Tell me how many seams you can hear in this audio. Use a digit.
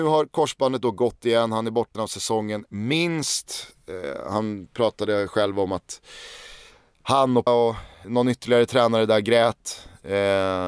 3